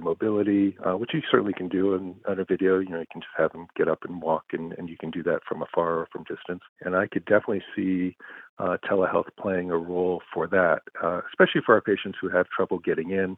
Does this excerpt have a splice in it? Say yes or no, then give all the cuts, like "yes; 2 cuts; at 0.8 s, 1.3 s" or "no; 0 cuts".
no; 0 cuts